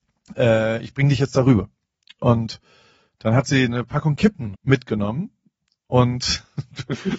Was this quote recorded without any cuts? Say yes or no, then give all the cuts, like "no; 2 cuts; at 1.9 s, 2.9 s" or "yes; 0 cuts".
no; 1 cut; at 4.5 s